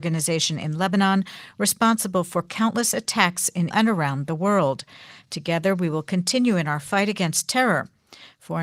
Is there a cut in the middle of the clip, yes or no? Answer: yes